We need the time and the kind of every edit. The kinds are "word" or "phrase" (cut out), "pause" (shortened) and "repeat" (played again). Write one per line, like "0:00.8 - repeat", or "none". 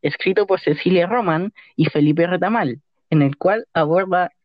none